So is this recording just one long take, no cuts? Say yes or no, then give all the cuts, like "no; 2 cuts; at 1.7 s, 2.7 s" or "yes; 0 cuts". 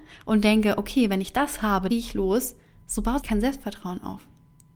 no; 2 cuts; at 1.9 s, 3.2 s